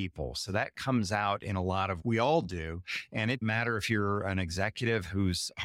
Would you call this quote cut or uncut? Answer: cut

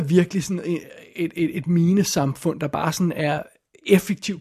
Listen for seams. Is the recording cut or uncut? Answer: cut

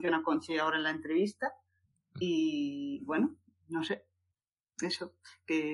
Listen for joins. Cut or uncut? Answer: uncut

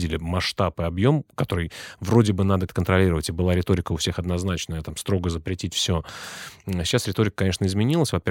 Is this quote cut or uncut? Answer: cut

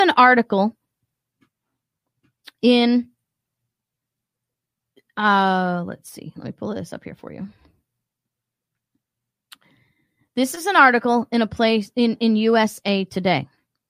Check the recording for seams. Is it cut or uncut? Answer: uncut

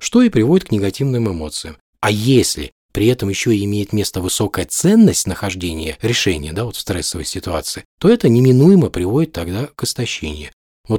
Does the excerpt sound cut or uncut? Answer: uncut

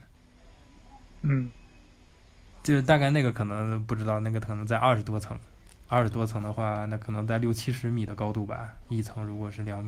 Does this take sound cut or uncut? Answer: uncut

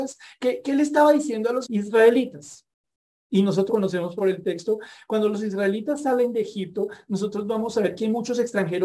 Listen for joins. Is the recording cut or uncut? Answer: cut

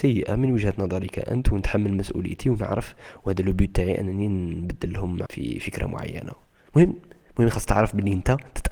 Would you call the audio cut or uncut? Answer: cut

